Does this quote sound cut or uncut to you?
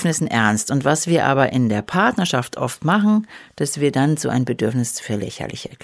uncut